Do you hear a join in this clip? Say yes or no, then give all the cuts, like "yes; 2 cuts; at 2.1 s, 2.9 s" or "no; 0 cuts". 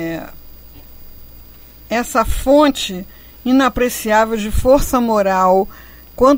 no; 0 cuts